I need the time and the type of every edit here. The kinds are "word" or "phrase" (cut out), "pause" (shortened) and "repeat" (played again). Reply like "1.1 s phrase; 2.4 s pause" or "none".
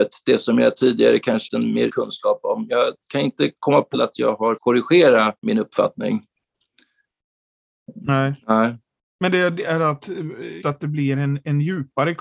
1.5 s phrase; 1.9 s word; 3.0 s pause; 3.9 s phrase; 4.6 s word; 5.4 s pause; 8.4 s pause; 10.6 s word

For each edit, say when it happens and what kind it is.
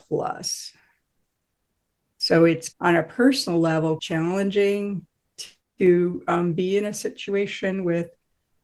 2.7 s word; 4.0 s word

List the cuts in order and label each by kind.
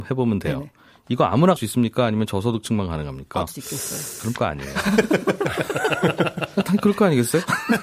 1.6 s word; 3.5 s phrase; 4.4 s phrase

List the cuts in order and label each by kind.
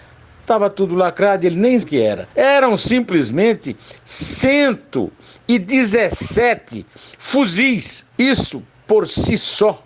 1.8 s word; 2.3 s pause; 8.1 s pause

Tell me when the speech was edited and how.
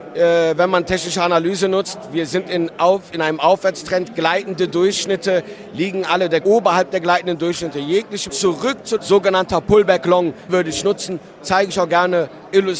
6.4 s phrase; 8.3 s word; 9.0 s phrase; 10.5 s word

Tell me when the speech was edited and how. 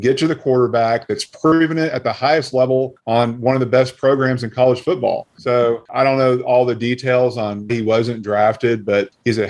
7.7 s word

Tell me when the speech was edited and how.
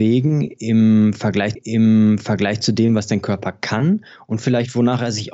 1.5 s repeat

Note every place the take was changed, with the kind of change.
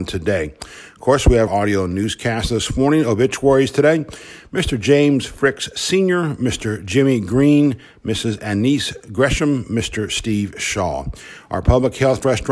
1.5 s word

